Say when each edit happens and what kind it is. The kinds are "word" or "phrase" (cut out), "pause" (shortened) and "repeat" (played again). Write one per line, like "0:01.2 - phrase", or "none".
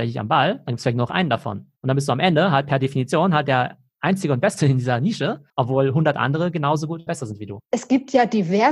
0:01.8 - pause
0:05.5 - pause
0:07.1 - word
0:07.7 - pause